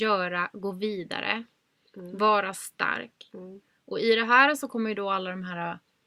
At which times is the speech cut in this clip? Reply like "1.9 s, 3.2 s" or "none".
none